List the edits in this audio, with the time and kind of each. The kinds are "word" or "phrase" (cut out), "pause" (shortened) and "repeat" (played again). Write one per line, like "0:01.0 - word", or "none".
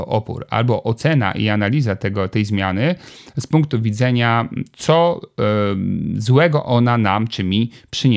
none